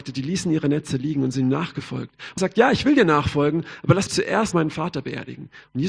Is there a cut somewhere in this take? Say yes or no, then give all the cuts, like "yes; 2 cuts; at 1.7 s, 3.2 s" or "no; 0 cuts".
yes; 3 cuts; at 2.4 s, 4.1 s, 4.5 s